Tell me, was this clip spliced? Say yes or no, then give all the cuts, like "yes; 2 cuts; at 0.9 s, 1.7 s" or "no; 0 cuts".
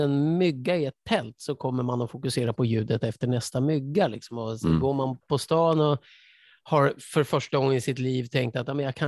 no; 0 cuts